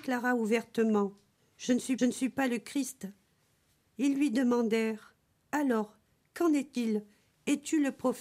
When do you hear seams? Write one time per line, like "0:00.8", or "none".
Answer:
0:02.0